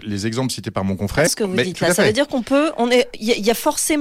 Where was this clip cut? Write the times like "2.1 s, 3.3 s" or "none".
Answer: 1.3 s